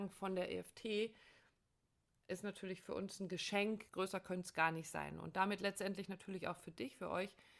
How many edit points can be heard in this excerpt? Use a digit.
1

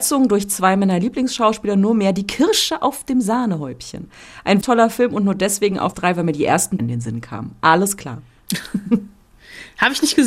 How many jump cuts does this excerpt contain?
3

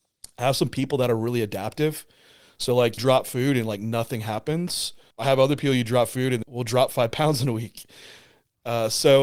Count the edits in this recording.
3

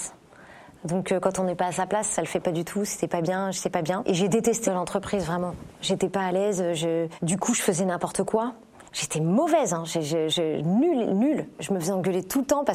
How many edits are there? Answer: 3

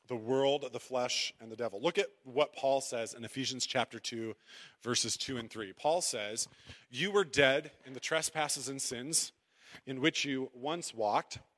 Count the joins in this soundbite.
0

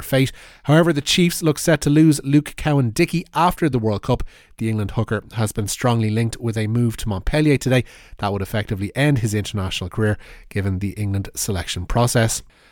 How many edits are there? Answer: 0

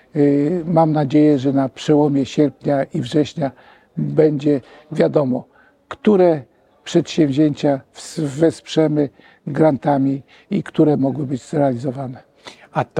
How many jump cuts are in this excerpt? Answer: 1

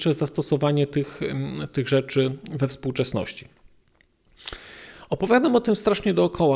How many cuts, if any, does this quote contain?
0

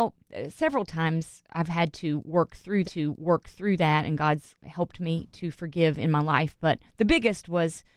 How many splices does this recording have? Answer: 3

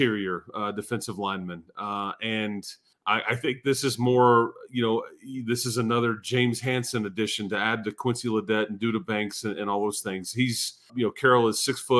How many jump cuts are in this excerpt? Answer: 2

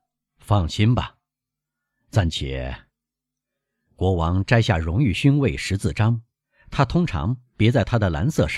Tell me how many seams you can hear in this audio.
0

